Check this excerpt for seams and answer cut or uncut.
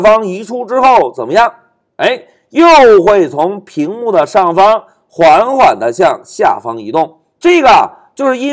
uncut